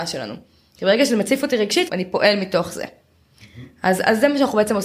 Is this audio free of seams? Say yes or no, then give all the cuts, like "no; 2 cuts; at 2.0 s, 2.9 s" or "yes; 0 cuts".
no; 1 cut; at 1.9 s